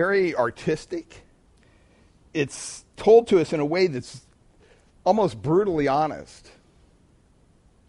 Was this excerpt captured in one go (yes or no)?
yes